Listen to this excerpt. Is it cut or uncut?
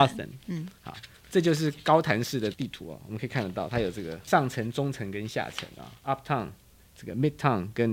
uncut